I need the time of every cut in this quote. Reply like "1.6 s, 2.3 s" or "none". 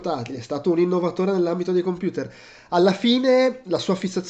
none